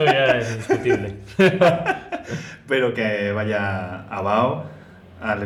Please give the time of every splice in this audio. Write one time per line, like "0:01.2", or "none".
0:02.9